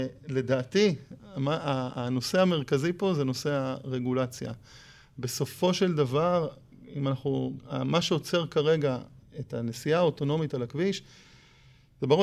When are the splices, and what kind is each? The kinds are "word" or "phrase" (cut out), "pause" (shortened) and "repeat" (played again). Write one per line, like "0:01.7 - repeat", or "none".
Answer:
none